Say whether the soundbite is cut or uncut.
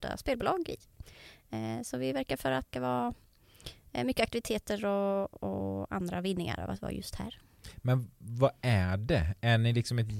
cut